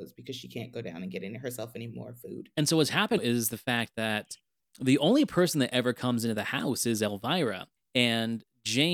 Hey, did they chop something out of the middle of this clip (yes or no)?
yes